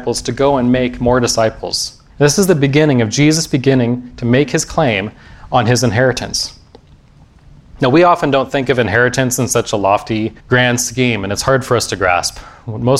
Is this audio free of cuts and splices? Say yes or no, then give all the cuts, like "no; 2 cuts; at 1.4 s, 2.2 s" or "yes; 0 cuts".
no; 2 cuts; at 2.1 s, 10.4 s